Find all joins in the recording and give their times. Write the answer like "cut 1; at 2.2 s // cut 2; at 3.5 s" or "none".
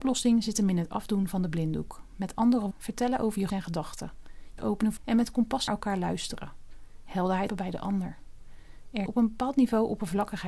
cut 1; at 2.7 s // cut 2; at 3.5 s // cut 3; at 4.6 s // cut 4; at 5.0 s // cut 5; at 5.7 s // cut 6; at 7.5 s // cut 7; at 9.1 s